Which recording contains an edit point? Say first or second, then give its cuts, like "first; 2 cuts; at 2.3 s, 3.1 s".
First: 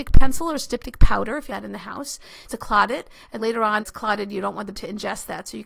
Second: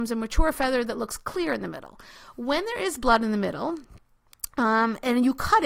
first; 5 cuts; at 1.5 s, 2.5 s, 3.4 s, 3.8 s, 4.7 s